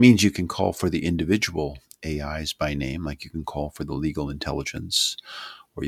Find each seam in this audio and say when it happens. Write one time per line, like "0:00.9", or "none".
none

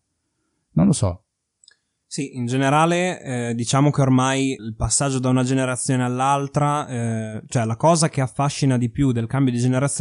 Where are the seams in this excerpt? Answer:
0:04.6

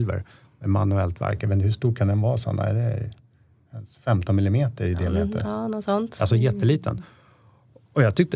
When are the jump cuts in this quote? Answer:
none

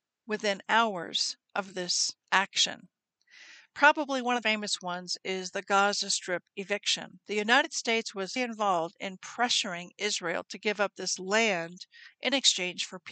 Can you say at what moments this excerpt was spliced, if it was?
0:02.2
0:04.4
0:08.4

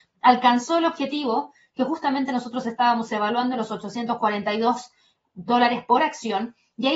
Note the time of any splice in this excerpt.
none

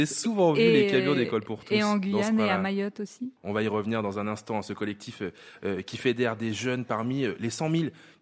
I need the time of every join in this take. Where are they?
0:03.4

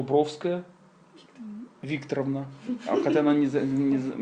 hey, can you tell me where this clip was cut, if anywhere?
0:01.8

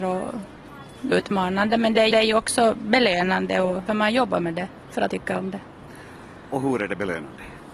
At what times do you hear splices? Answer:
0:01.1
0:02.1
0:03.9
0:05.1

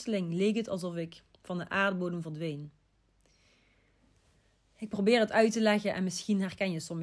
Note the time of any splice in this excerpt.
none

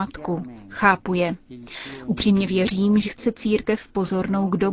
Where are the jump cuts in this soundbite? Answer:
0:02.5
0:03.0

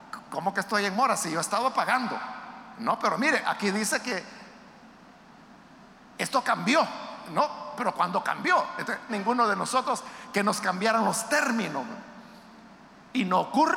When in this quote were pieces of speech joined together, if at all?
0:09.1

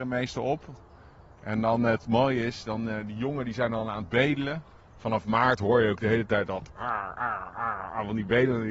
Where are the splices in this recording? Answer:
none

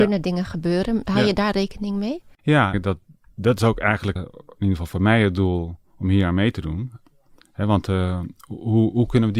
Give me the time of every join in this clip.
0:02.7
0:04.2

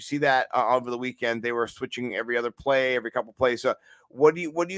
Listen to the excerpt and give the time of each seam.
none

